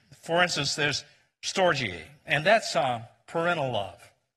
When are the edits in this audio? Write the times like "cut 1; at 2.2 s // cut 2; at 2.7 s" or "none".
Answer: none